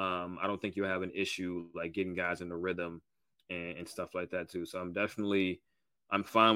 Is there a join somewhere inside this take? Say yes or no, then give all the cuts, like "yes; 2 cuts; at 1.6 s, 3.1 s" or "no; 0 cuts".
no; 0 cuts